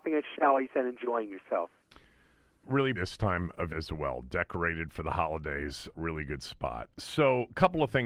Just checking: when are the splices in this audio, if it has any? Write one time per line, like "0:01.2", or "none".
0:02.6
0:02.9
0:03.7
0:05.9
0:06.9